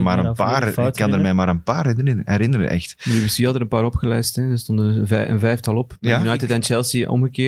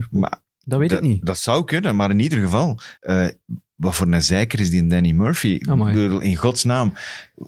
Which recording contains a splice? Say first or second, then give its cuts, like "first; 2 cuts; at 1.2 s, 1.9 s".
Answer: second; 1 cut; at 3.0 s